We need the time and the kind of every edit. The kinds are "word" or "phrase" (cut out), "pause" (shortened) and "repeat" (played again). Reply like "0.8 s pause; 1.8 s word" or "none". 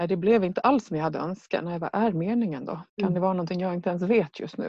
2.9 s pause